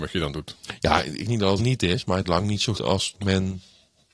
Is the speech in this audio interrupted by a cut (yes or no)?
yes